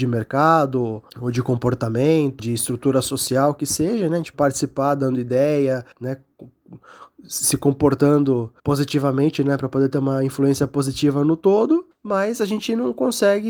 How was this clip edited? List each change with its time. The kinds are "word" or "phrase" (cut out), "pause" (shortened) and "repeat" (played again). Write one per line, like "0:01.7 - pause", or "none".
0:01.1 - pause
0:02.4 - word
0:04.3 - word
0:05.9 - pause
0:08.6 - pause
0:11.9 - pause